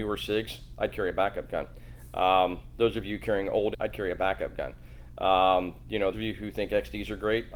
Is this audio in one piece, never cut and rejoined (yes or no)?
no